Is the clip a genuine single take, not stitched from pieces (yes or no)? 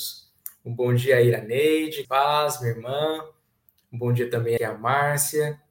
no